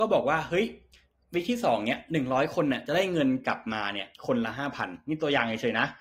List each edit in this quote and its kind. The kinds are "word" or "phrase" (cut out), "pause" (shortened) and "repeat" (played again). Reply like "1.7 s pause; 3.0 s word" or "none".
4.1 s pause